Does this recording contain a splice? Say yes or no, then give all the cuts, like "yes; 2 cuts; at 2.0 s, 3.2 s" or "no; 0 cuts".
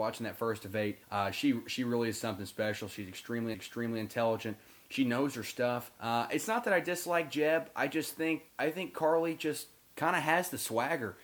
yes; 5 cuts; at 1.0 s, 3.5 s, 6.0 s, 8.5 s, 9.8 s